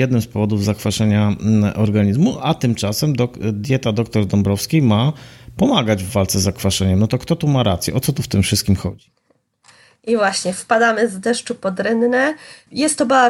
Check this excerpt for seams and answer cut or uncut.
uncut